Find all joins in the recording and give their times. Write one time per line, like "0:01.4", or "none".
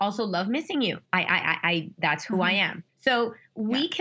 0:01.1
0:02.9